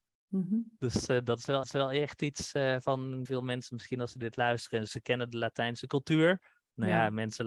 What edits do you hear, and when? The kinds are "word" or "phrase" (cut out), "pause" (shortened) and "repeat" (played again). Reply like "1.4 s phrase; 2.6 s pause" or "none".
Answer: 1.6 s repeat; 3.2 s word; 4.9 s word